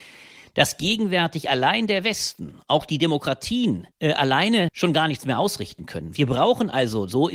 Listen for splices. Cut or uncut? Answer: cut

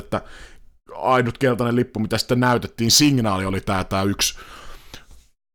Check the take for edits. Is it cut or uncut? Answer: uncut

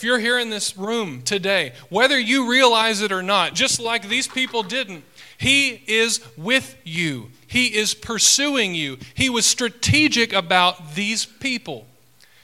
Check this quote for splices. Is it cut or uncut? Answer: uncut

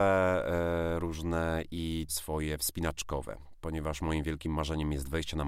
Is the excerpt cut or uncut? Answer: cut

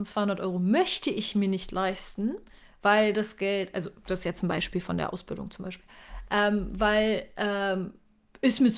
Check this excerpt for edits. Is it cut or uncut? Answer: uncut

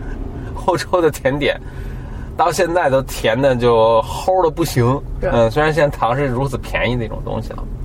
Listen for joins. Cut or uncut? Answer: cut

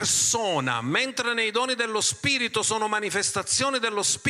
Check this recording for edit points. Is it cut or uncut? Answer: uncut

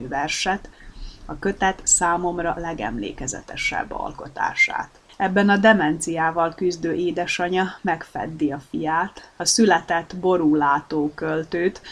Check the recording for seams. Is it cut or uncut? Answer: cut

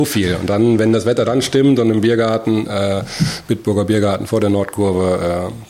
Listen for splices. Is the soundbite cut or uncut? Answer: uncut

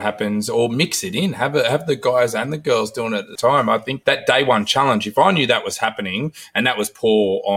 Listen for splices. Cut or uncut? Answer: cut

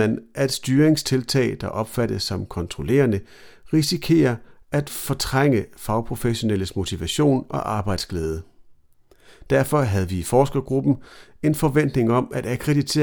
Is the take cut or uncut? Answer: uncut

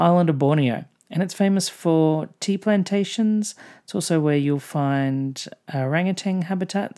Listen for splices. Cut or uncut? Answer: uncut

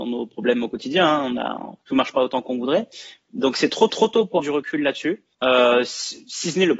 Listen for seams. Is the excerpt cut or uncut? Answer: cut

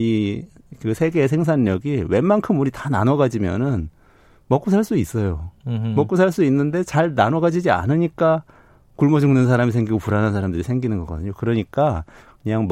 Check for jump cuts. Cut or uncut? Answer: uncut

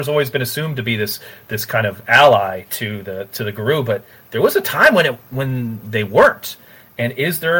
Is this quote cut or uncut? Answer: uncut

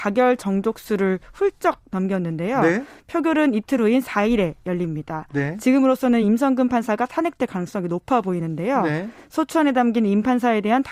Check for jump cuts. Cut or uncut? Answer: uncut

